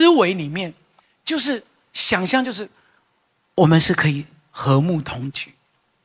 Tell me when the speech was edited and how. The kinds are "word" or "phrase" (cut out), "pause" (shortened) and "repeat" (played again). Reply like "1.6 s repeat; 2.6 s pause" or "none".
none